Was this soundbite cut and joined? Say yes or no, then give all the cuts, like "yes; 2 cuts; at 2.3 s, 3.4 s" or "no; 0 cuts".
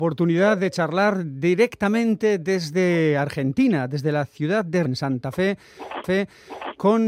yes; 2 cuts; at 4.9 s, 6.0 s